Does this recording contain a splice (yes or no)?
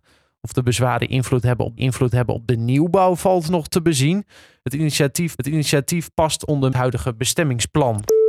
yes